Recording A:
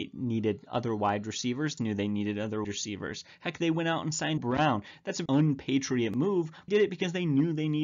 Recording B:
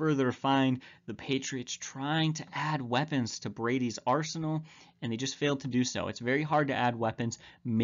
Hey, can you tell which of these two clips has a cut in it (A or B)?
A